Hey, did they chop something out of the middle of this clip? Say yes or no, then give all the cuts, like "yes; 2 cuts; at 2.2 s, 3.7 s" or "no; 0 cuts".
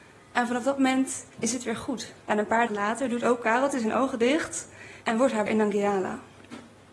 yes; 5 cuts; at 1.3 s, 2.2 s, 2.7 s, 5.0 s, 5.5 s